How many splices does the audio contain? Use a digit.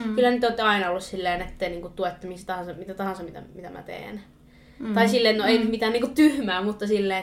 0